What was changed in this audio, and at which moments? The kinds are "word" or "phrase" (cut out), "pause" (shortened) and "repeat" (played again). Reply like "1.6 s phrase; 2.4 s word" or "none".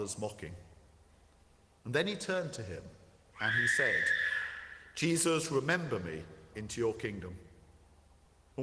6.5 s phrase